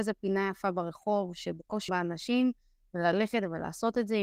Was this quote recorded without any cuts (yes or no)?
no